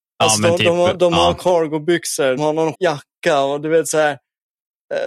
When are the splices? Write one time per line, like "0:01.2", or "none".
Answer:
0:02.4
0:02.7